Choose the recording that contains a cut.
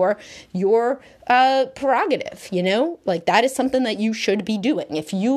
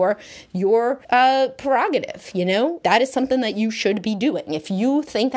second; 2 cuts; at 1.0 s, 2.8 s

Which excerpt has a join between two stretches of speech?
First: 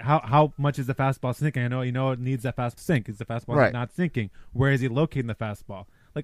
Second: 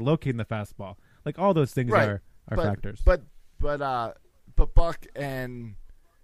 first; 1 cut; at 2.8 s

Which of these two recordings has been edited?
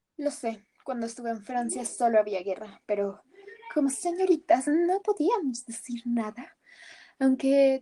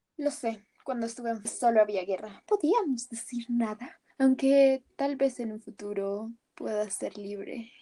second; 3 cuts; at 1.4 s, 2.5 s, 4.1 s

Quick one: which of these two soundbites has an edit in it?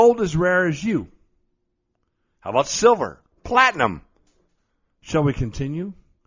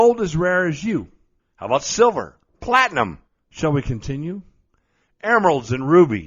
second; 2 cuts; at 1.4 s, 3.3 s

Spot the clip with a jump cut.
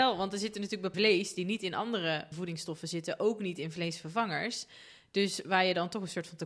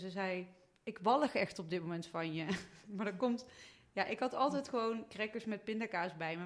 first; 2 cuts; at 0.9 s, 2.3 s

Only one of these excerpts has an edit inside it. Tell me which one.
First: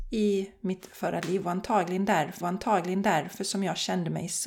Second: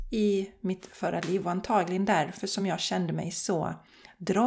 first; 1 cut; at 2.4 s

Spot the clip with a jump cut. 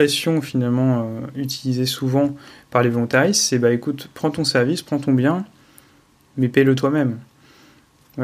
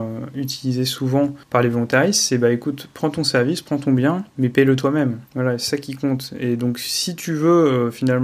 second; 3 cuts; at 1.4 s, 4.3 s, 5.3 s

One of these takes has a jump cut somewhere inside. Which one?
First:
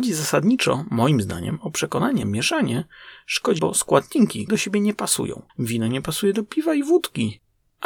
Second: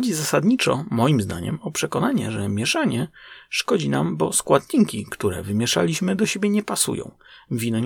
first; 4 cuts; at 2.2 s, 3.6 s, 4.5 s, 5.5 s

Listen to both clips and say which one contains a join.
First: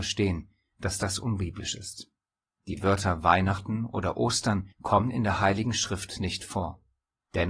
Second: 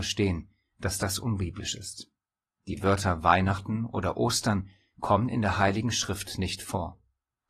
first; 1 cut; at 4.7 s

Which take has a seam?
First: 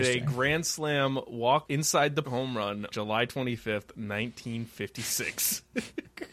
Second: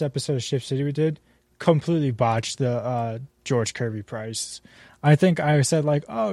first; 3 cuts; at 1.7 s, 2.2 s, 2.9 s

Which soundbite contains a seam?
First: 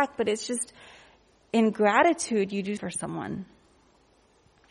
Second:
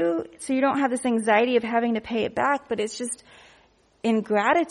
first; 1 cut; at 2.8 s

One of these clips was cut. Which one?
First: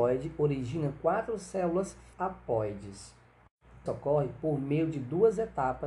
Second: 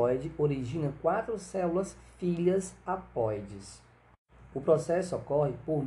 first; 2 cuts; at 2.1 s, 3.9 s

